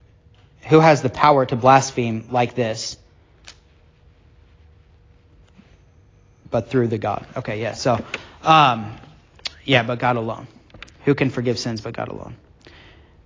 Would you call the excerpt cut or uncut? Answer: uncut